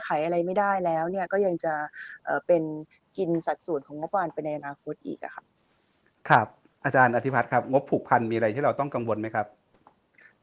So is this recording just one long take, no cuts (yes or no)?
yes